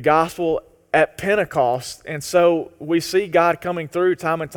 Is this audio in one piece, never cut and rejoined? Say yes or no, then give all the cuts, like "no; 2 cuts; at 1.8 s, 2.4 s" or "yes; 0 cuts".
yes; 0 cuts